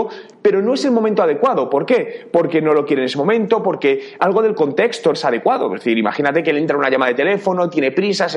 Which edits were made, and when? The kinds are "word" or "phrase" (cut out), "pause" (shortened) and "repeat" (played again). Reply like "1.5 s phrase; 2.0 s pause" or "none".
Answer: 4.2 s word; 5.1 s word